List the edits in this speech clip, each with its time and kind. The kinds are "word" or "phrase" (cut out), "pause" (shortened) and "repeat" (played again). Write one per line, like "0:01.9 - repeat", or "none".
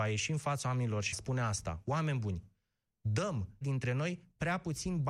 0:01.1 - word
0:03.6 - word

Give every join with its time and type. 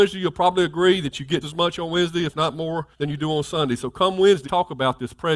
0:01.4 - word
0:02.9 - pause
0:04.4 - word

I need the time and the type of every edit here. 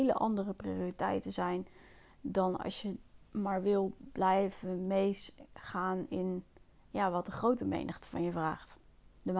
0:03.2 - pause

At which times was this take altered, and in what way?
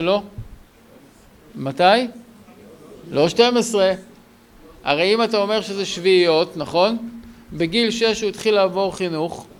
none

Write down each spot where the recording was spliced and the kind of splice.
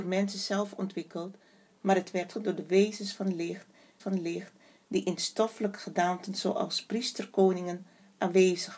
0:02.3 - word
0:04.0 - repeat

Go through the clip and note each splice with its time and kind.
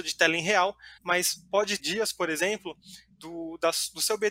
0:01.0 - pause
0:01.8 - word
0:03.1 - word

